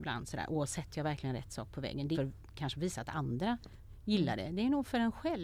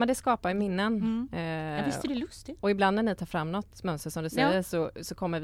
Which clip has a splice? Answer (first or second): first